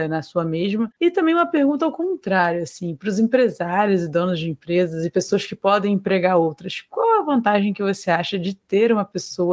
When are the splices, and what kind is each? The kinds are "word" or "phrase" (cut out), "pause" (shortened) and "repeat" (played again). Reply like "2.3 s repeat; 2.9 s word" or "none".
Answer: 1.0 s pause